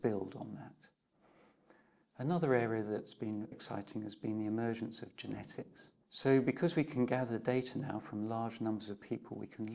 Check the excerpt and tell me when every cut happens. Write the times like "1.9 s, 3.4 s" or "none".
3.5 s, 6.0 s